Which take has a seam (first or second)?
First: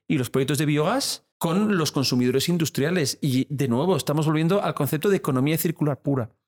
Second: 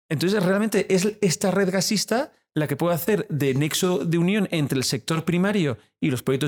first